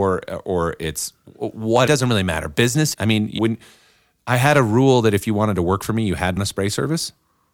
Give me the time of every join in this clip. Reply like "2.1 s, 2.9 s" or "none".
1.9 s, 2.9 s, 3.4 s, 6.4 s